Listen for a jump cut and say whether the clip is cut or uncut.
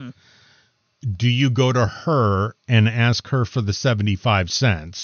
uncut